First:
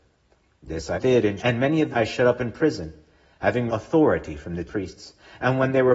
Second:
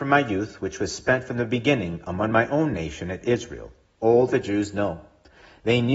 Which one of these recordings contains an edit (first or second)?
first